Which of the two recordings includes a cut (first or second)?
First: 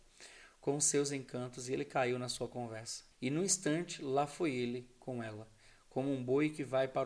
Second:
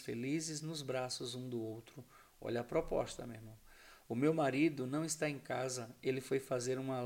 first